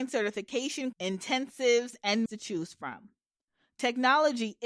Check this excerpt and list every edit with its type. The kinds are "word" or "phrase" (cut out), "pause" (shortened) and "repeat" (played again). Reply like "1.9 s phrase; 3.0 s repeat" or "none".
0.9 s word; 2.3 s word